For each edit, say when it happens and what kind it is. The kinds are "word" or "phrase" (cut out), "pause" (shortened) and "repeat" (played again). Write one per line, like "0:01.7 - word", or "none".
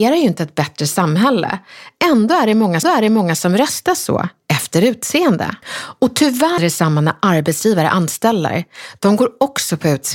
0:02.8 - repeat
0:05.6 - pause
0:06.6 - word